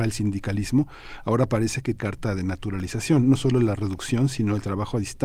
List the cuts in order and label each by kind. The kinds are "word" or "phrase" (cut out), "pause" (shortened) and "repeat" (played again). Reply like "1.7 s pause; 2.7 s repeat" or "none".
2.0 s word